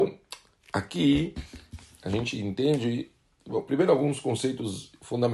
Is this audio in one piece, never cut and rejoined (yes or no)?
yes